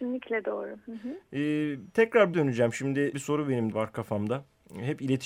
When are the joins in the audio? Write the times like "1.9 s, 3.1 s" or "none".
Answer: 2.3 s, 3.1 s, 3.7 s